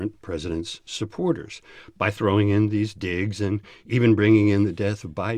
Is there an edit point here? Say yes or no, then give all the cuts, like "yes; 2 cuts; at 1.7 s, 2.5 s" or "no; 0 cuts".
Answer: no; 0 cuts